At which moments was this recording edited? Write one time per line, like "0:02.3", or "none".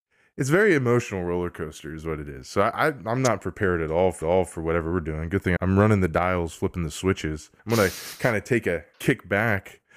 0:04.2
0:05.6
0:07.6
0:08.9